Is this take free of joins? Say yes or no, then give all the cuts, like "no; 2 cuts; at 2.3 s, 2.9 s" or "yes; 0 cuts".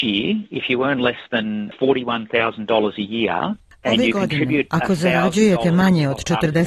yes; 0 cuts